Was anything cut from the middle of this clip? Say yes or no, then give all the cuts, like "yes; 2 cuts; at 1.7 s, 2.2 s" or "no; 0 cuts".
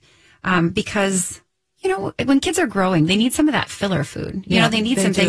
no; 0 cuts